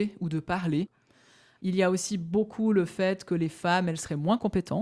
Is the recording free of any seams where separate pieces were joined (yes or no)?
yes